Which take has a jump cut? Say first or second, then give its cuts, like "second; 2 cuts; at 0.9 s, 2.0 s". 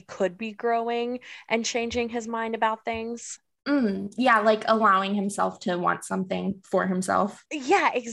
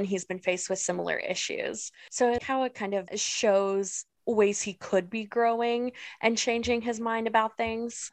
second; 1 cut; at 2.4 s